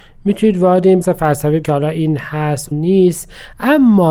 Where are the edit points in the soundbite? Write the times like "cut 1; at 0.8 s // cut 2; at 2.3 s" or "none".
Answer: cut 1; at 1.0 s // cut 2; at 1.6 s // cut 3; at 2.7 s

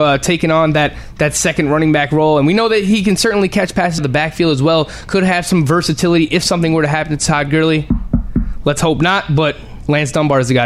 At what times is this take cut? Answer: cut 1; at 4.0 s

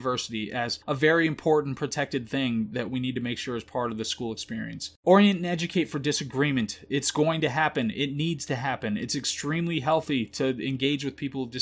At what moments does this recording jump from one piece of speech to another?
cut 1; at 5.0 s

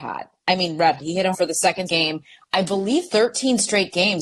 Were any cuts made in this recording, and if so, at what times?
cut 1; at 1.0 s // cut 2; at 1.3 s // cut 3; at 1.9 s // cut 4; at 3.1 s

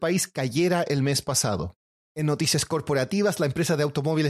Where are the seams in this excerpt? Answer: cut 1; at 2.0 s

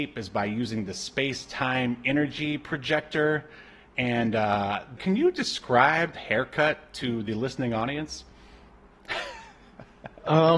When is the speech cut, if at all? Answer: cut 1; at 5.0 s // cut 2; at 6.1 s

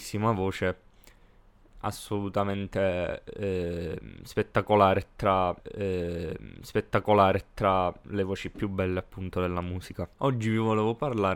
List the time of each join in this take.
cut 1; at 5.6 s // cut 2; at 10.1 s

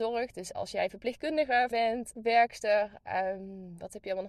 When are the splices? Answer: cut 1; at 1.7 s // cut 2; at 2.1 s

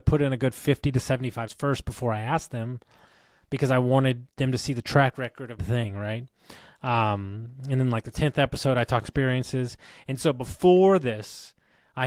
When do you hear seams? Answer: cut 1; at 1.5 s // cut 2; at 5.6 s // cut 3; at 9.0 s

